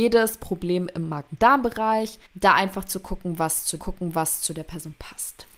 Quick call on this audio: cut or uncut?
cut